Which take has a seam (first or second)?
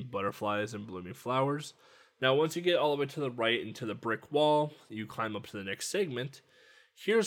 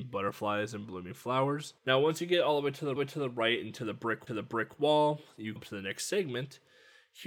second